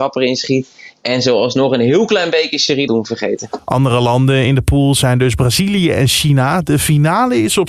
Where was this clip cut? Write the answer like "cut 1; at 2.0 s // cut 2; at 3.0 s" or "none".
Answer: cut 1; at 2.9 s